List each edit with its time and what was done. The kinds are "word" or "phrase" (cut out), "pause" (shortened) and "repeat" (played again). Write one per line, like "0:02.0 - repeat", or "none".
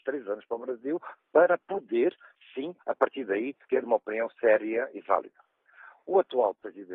0:02.8 - pause
0:03.6 - pause